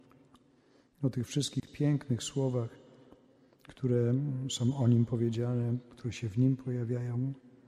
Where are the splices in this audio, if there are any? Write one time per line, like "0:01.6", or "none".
none